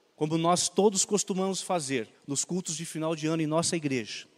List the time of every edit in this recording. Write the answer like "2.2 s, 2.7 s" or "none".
2.1 s